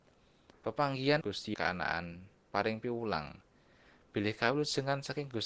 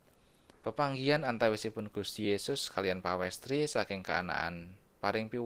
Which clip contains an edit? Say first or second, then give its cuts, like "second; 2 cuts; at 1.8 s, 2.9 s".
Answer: first; 2 cuts; at 1.2 s, 1.5 s